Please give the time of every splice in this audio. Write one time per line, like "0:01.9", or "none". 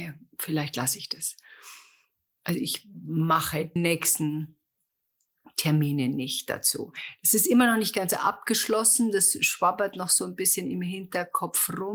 0:03.8